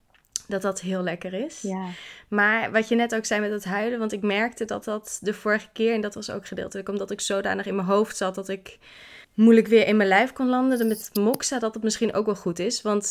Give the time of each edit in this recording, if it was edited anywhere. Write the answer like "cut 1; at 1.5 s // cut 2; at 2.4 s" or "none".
cut 1; at 9.2 s